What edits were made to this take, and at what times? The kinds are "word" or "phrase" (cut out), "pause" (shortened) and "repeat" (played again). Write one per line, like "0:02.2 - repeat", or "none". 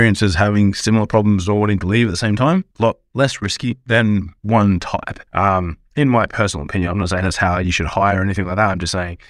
0:02.7 - pause
0:04.4 - pause
0:05.3 - pause